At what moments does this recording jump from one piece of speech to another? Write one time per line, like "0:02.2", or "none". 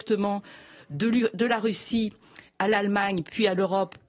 0:02.5